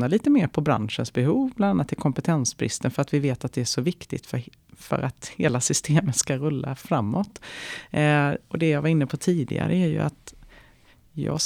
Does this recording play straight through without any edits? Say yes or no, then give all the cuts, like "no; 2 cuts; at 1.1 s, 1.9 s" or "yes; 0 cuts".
yes; 0 cuts